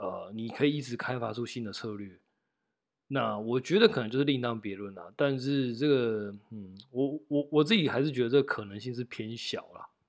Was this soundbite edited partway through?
no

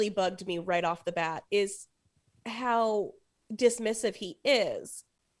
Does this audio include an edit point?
no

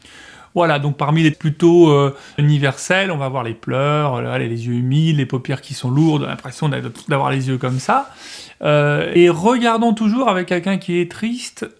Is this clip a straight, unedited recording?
no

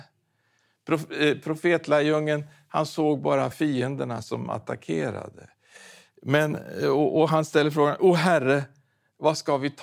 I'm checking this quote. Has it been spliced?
no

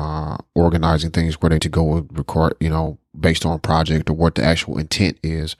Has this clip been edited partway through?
yes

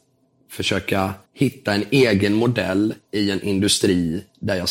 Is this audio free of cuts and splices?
no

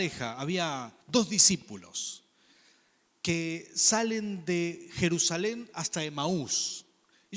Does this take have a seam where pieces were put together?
yes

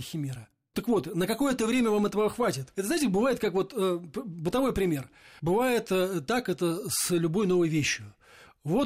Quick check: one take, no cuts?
yes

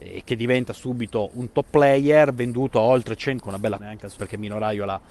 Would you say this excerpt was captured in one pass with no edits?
no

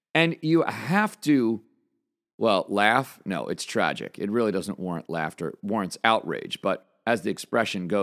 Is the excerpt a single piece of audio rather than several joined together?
yes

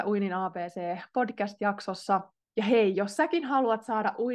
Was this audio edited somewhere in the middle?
no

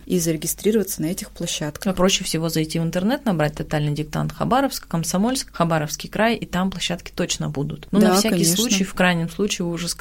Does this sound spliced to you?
no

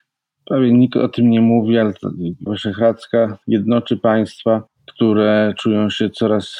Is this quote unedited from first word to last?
no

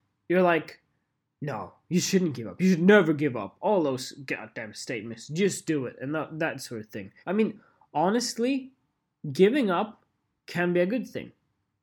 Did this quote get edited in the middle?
yes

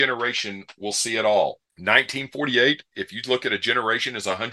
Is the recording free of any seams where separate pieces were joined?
no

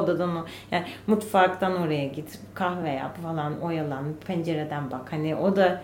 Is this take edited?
no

